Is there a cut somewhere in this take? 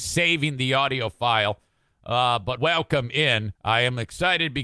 yes; 2 cuts; at 2.6 s, 3.6 s

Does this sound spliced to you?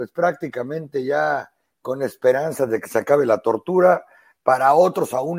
no; 0 cuts

